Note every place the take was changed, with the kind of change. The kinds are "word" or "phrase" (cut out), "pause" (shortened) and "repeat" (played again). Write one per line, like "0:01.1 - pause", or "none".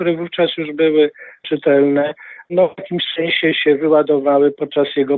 none

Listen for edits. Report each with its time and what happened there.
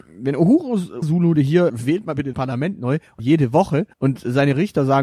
0:01.0 - word
0:01.3 - phrase
0:01.7 - word
0:02.3 - word
0:03.2 - word
0:03.9 - pause

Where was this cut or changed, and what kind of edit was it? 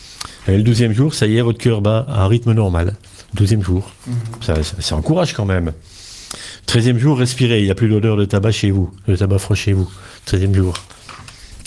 0:04.0 - pause

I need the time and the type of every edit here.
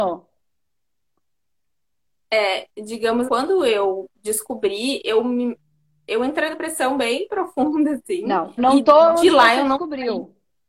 0:03.3 - word
0:06.5 - word
0:08.6 - word

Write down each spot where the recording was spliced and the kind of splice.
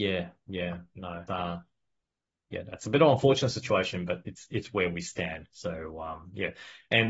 0:01.3 - word

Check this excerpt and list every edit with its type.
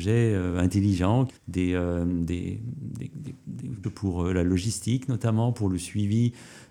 0:01.4 - pause
0:03.8 - word

